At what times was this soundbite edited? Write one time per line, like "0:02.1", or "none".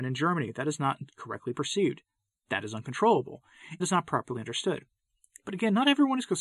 0:03.8